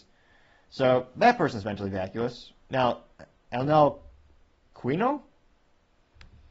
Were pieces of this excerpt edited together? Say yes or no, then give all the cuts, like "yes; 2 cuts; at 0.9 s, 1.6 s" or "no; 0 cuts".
yes; 1 cut; at 4.4 s